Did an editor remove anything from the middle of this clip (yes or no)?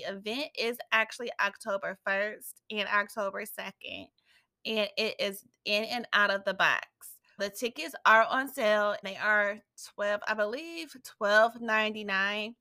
yes